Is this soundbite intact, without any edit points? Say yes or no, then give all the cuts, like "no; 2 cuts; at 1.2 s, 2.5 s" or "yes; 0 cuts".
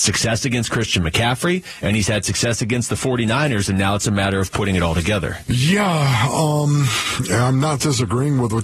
yes; 0 cuts